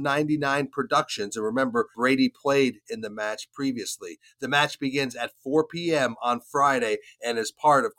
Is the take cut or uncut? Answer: uncut